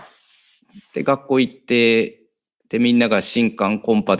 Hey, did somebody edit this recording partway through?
no; 0 cuts

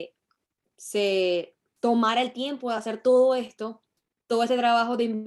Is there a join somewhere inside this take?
no; 0 cuts

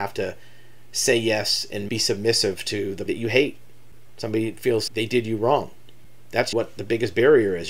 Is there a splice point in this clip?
yes; 4 cuts; at 1.9 s, 3.1 s, 4.9 s, 6.5 s

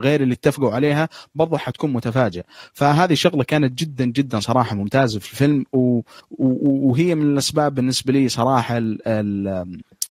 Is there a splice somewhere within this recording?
no; 0 cuts

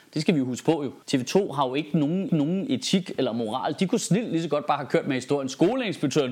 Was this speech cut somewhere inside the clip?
yes; 2 cuts; at 1.0 s, 2.3 s

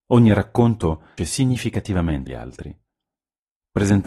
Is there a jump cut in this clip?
yes; 2 cuts; at 1.2 s, 2.3 s

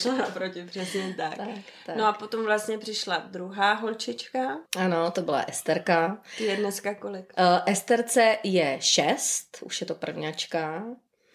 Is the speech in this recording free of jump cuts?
no; 1 cut; at 4.7 s

